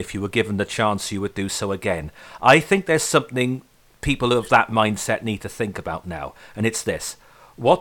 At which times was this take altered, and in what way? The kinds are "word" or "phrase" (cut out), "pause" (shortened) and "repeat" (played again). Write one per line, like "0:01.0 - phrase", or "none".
none